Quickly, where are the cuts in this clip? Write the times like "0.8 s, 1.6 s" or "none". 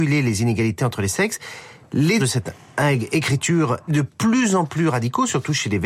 2.2 s, 3.9 s